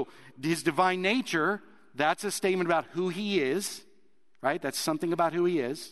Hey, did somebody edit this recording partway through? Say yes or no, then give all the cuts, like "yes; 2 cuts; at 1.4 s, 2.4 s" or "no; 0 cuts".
no; 0 cuts